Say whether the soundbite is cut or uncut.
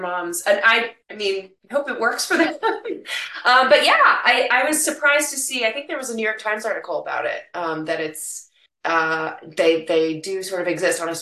cut